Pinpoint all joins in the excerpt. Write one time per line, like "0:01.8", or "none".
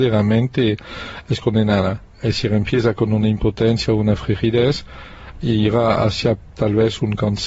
0:02.1